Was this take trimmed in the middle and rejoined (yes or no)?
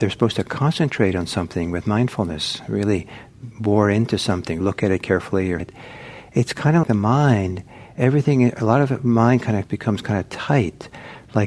yes